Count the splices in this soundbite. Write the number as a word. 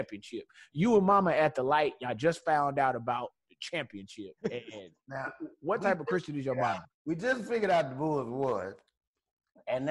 two